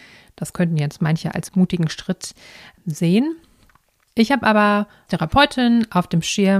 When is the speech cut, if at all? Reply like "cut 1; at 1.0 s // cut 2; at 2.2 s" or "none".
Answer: cut 1; at 1.5 s // cut 2; at 5.1 s

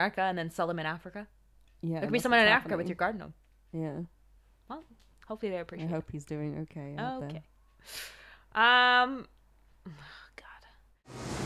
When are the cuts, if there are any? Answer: none

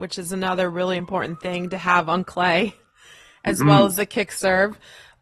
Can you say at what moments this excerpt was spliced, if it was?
none

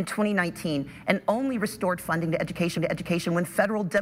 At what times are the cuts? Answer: cut 1; at 2.8 s

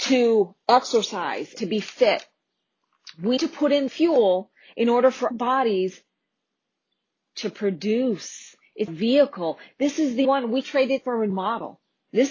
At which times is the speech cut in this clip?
cut 1; at 1.6 s // cut 2; at 3.4 s // cut 3; at 3.9 s // cut 4; at 5.3 s // cut 5; at 8.9 s // cut 6; at 10.2 s // cut 7; at 10.6 s // cut 8; at 11.0 s // cut 9; at 11.3 s

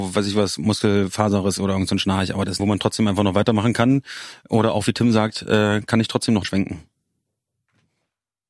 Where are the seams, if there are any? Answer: cut 1; at 2.6 s // cut 2; at 6.4 s

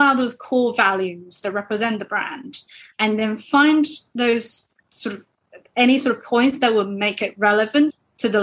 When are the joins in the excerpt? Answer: cut 1; at 4.8 s

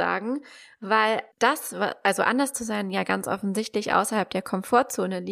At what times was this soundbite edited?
cut 1; at 1.3 s

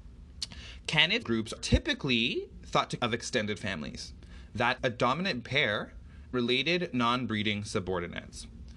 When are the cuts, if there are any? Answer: cut 1; at 1.2 s // cut 2; at 1.6 s // cut 3; at 3.0 s // cut 4; at 4.8 s // cut 5; at 5.4 s // cut 6; at 6.3 s

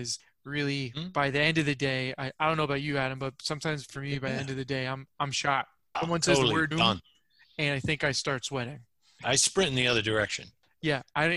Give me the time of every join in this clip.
cut 1; at 5.9 s // cut 2; at 6.7 s

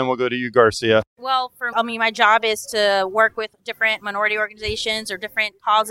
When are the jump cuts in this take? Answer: cut 1; at 1.1 s // cut 2; at 1.7 s

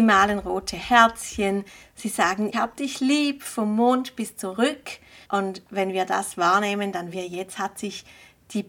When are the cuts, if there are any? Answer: cut 1; at 2.5 s // cut 2; at 5.2 s // cut 3; at 7.1 s

